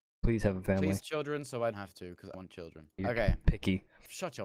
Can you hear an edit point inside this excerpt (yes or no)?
yes